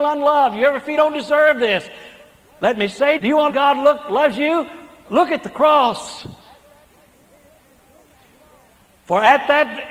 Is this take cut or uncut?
cut